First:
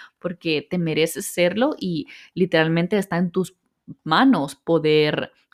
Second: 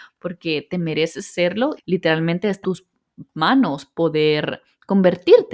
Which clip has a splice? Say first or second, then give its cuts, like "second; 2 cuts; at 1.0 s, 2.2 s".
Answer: second; 2 cuts; at 1.8 s, 2.6 s